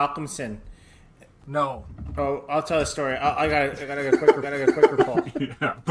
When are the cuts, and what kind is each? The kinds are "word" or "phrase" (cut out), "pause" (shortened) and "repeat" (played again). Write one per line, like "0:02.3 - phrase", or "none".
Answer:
0:04.4 - repeat